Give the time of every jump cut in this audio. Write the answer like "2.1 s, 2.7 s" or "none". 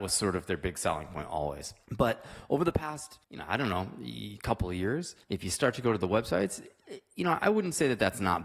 3.2 s, 5.2 s